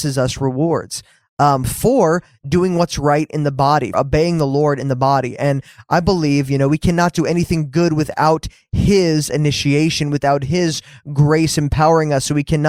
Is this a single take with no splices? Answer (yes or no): no